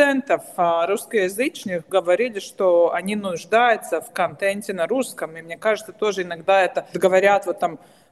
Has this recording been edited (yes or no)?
yes